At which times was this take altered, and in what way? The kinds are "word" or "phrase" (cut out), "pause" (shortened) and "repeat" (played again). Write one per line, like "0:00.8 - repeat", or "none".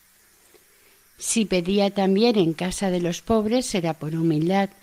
none